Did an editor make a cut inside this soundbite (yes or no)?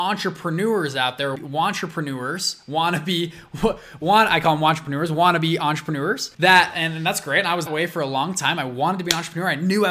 yes